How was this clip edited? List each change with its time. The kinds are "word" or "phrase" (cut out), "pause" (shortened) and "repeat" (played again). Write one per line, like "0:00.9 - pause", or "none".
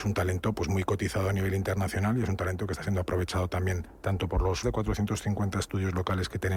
0:04.6 - word